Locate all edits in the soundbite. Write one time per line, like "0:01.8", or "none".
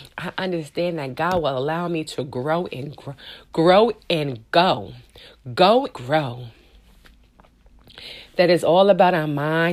0:05.9